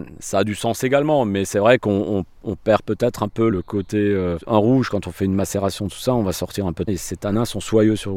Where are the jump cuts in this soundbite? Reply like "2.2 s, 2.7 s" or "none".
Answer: 3.5 s, 6.9 s